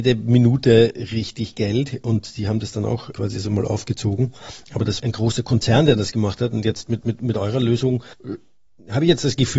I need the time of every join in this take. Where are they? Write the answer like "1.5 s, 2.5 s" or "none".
3.1 s, 5.0 s, 7.0 s, 8.1 s